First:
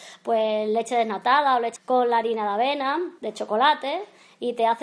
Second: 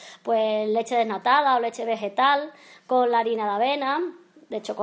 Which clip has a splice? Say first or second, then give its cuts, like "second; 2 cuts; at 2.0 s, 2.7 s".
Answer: first; 2 cuts; at 1.8 s, 3.2 s